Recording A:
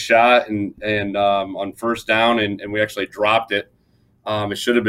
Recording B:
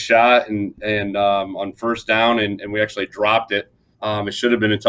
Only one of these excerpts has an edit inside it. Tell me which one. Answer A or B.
B